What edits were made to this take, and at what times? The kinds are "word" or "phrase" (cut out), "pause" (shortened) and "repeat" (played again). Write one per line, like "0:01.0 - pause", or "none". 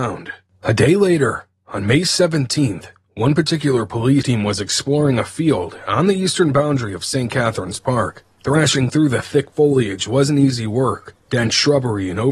0:04.2 - word

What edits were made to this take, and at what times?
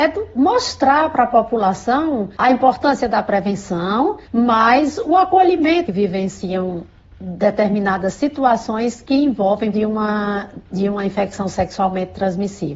0:02.4 - pause
0:04.3 - pause
0:05.9 - phrase
0:09.7 - phrase

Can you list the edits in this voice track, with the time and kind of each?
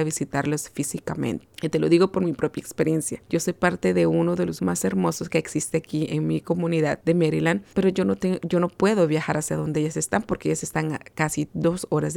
0:04.6 - word

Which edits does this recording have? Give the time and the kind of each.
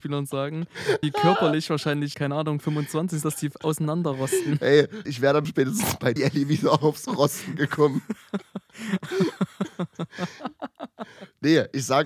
0:01.0 - word
0:02.1 - word
0:03.2 - word
0:05.0 - word
0:05.4 - word
0:06.2 - word

